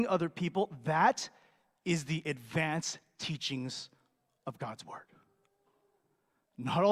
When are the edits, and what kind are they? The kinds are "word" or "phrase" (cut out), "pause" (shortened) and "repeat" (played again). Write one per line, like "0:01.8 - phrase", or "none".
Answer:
none